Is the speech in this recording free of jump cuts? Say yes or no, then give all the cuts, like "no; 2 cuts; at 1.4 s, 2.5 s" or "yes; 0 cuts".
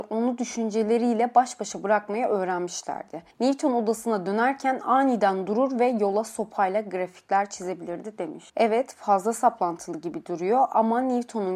no; 2 cuts; at 3.3 s, 8.5 s